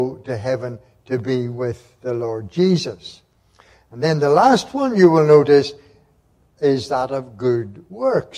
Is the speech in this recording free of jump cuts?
yes; 0 cuts

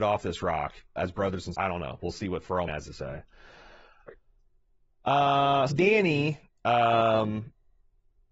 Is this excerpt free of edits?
no; 4 cuts; at 1.0 s, 1.5 s, 2.7 s, 5.7 s

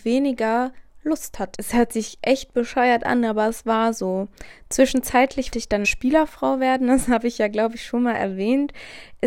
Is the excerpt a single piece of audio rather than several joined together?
no; 3 cuts; at 1.5 s, 5.5 s, 5.8 s

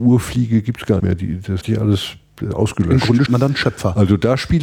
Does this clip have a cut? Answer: yes; 4 cuts; at 1.0 s, 1.6 s, 2.5 s, 3.3 s

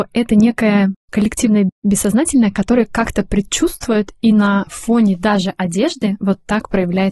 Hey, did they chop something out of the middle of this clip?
no; 0 cuts

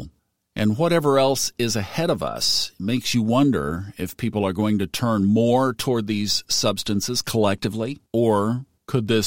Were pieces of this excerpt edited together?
yes; 1 cut; at 8.1 s

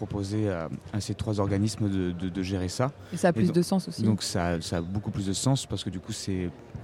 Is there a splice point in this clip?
no; 0 cuts

